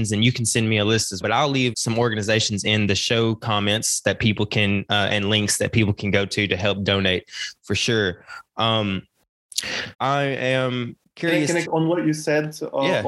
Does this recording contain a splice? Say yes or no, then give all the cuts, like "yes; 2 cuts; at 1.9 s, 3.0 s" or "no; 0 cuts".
yes; 5 cuts; at 1.2 s, 1.7 s, 9.9 s, 11.0 s, 11.6 s